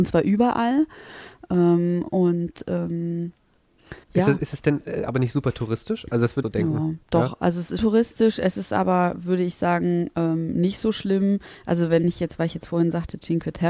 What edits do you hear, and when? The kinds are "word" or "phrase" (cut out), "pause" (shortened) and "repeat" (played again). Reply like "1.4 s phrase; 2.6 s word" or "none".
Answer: 4.0 s pause; 6.4 s phrase; 7.0 s pause; 7.8 s word